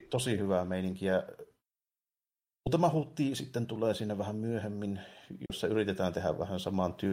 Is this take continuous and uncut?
yes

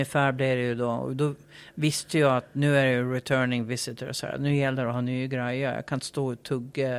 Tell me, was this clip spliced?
no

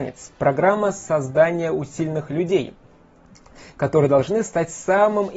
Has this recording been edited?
no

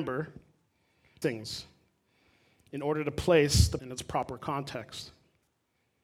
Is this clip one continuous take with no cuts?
no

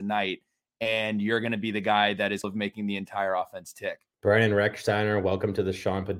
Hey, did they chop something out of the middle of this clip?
yes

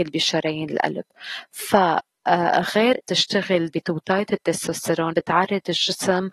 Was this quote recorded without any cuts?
no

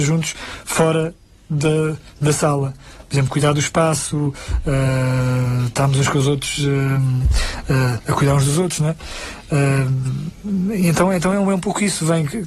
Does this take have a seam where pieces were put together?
no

